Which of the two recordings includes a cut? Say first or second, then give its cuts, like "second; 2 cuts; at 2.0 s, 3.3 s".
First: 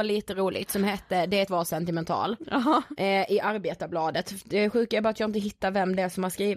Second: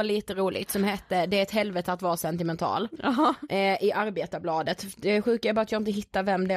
first; 1 cut; at 1.5 s